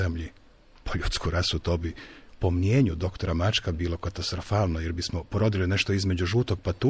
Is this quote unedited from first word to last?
yes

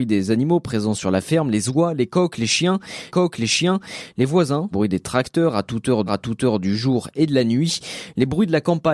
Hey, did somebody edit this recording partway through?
yes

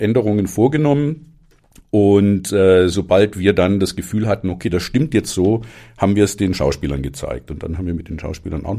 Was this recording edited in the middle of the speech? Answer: no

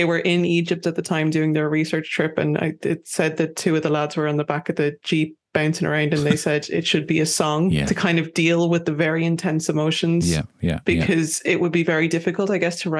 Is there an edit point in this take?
no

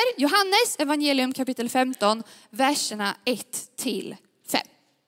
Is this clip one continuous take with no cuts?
yes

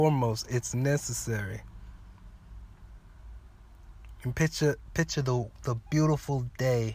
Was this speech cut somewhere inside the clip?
no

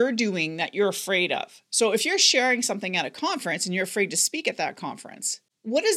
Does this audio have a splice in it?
no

